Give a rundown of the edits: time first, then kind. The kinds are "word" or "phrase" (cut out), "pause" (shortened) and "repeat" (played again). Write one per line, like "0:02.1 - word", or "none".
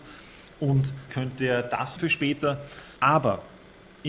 0:01.1 - word
0:02.0 - phrase
0:03.0 - pause